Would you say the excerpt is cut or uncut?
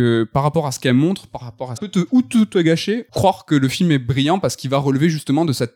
cut